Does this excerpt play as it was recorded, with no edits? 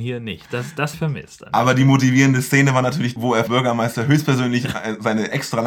no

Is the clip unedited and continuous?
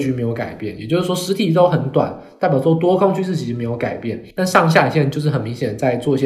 no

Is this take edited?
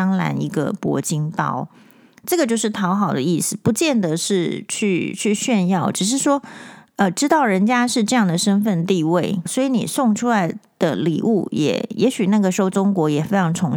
yes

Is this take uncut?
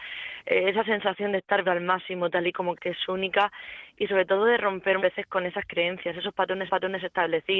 no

